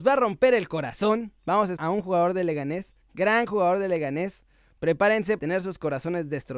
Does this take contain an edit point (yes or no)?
yes